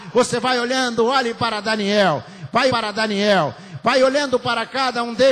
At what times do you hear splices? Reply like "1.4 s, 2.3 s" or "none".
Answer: 2.7 s